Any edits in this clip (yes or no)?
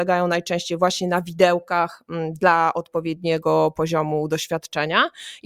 no